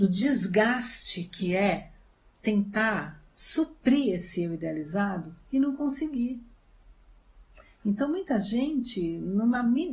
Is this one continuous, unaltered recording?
yes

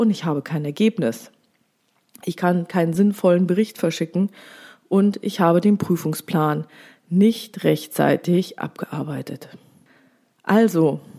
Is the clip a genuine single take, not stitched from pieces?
yes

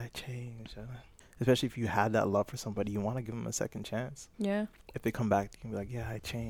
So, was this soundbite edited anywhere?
yes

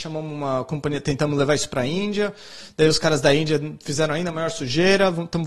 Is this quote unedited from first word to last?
yes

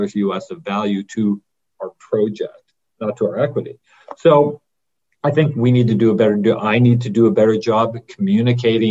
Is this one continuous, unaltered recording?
yes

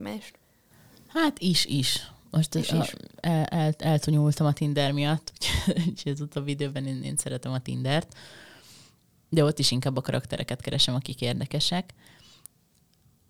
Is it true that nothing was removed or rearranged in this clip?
yes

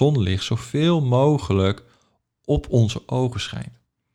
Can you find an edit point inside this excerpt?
no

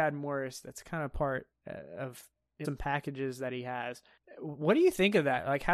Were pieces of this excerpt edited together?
yes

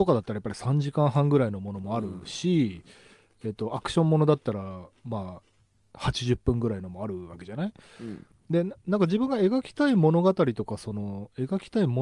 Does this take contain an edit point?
no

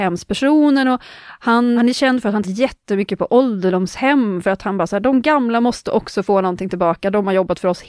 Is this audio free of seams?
no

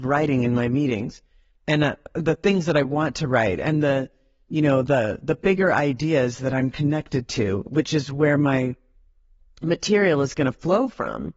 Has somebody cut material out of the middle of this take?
no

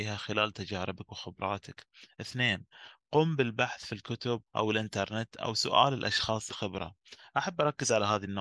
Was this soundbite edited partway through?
yes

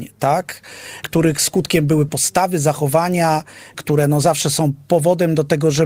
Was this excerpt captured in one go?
no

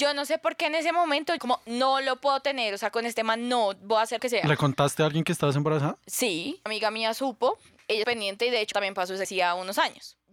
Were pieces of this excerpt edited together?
yes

